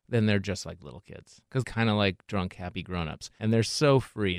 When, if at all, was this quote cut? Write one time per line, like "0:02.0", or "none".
0:01.6